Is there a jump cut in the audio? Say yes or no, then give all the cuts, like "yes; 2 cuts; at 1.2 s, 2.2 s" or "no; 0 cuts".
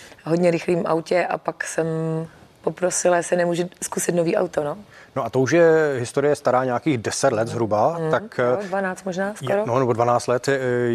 no; 0 cuts